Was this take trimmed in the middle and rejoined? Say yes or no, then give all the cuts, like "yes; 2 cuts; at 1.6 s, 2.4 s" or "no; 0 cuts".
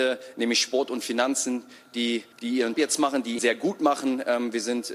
yes; 3 cuts; at 2.3 s, 2.7 s, 3.4 s